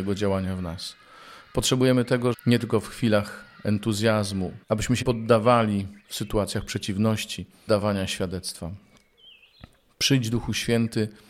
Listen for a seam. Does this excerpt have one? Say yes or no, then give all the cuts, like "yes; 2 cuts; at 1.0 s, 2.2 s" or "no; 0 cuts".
yes; 5 cuts; at 2.3 s, 4.6 s, 5.0 s, 6.0 s, 7.7 s